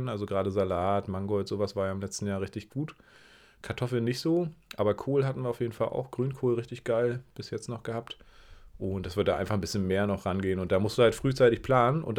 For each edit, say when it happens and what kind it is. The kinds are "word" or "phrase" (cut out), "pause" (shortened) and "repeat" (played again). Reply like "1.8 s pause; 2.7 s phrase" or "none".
none